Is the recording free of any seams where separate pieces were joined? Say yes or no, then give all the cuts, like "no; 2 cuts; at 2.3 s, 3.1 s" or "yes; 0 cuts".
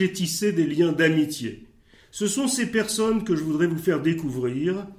yes; 0 cuts